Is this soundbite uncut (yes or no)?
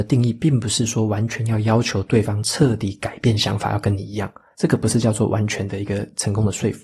yes